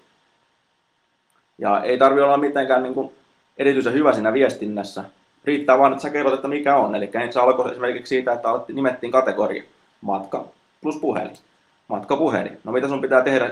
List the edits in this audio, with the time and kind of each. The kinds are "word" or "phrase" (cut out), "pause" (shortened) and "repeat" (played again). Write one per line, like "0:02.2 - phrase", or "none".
none